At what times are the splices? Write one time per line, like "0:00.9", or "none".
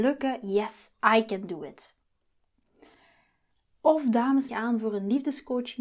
0:04.5